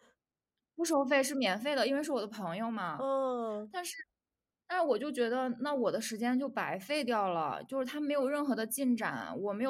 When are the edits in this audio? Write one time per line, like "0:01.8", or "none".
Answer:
none